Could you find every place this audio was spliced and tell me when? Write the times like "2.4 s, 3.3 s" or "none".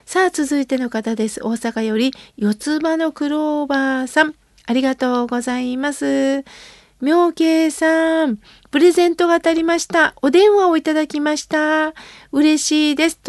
none